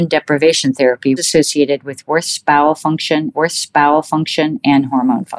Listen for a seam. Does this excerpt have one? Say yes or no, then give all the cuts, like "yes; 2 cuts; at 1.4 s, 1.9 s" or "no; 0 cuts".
yes; 2 cuts; at 1.2 s, 3.3 s